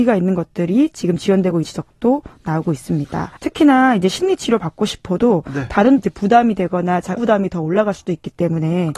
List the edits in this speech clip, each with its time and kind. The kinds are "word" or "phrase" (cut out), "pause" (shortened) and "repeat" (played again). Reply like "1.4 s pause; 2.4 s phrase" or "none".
1.6 s word; 3.4 s pause; 6.0 s word; 7.2 s word